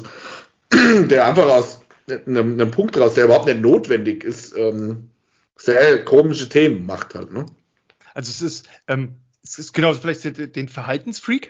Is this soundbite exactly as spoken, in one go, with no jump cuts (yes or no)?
yes